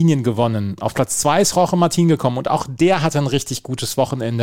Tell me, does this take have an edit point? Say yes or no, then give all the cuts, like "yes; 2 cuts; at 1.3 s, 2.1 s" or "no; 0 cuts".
no; 0 cuts